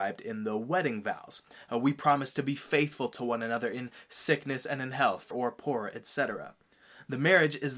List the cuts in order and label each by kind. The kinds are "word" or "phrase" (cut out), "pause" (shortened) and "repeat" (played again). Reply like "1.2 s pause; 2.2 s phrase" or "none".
5.3 s word